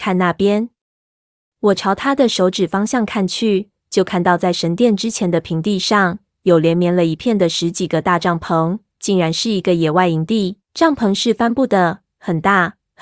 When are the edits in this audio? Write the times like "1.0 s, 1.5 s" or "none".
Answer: 10.6 s